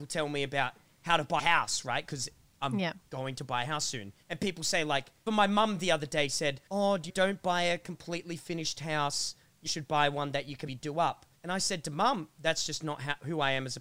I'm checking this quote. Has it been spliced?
yes; 8 cuts; at 1.4 s, 4.2 s, 5.3 s, 6.7 s, 7.1 s, 9.7 s, 10.7 s, 11.4 s

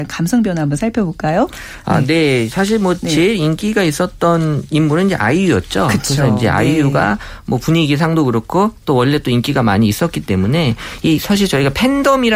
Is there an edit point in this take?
no; 0 cuts

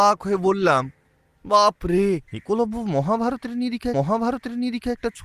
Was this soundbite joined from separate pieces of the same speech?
yes; 2 cuts; at 2.3 s, 3.9 s

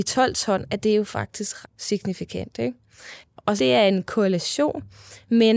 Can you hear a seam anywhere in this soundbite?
yes; 2 cuts; at 1.6 s, 3.6 s

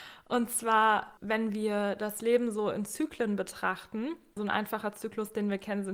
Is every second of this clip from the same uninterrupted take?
no; 2 cuts; at 1.2 s, 4.4 s

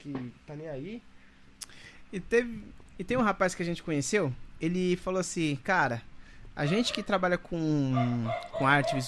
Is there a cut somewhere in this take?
no; 0 cuts

